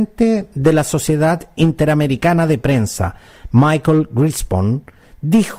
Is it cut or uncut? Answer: uncut